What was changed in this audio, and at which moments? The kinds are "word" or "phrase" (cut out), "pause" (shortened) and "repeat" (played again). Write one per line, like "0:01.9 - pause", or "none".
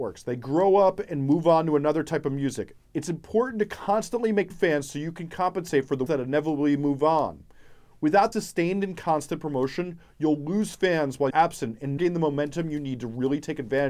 0:04.5 - word
0:06.1 - word
0:08.3 - word
0:11.3 - word
0:12.0 - word